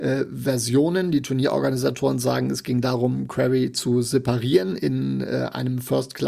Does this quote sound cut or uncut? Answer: uncut